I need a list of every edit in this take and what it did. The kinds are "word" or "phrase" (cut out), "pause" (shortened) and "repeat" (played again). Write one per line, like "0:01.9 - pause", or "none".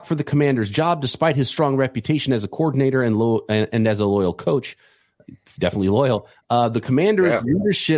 none